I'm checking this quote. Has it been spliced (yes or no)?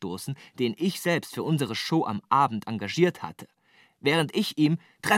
no